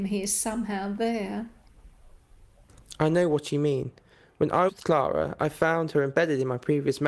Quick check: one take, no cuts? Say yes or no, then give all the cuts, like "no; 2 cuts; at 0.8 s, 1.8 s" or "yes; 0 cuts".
no; 1 cut; at 4.7 s